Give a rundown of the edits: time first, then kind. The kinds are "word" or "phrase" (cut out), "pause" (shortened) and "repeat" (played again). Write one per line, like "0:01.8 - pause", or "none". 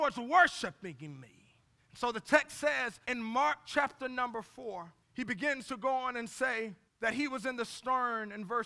0:01.8 - pause
0:03.0 - pause
0:05.0 - pause
0:06.9 - pause